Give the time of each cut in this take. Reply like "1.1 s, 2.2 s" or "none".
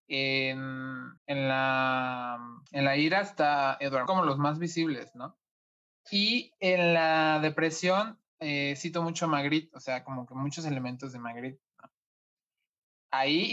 1.2 s, 2.7 s, 4.1 s, 5.8 s, 8.3 s